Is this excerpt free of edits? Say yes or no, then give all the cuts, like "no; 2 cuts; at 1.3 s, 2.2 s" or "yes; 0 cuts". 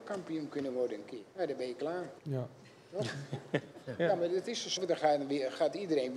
no; 3 cuts; at 1.3 s, 2.2 s, 4.8 s